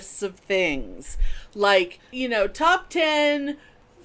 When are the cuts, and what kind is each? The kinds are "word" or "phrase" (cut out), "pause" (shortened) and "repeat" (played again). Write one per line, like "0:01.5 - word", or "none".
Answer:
none